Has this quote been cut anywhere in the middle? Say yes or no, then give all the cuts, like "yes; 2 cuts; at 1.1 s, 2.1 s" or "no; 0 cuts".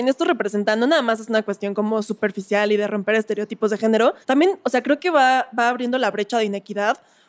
yes; 1 cut; at 4.2 s